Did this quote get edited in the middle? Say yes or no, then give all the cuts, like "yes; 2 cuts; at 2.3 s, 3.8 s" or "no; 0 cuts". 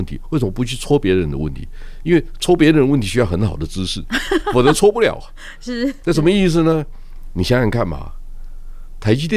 yes; 1 cut; at 6.0 s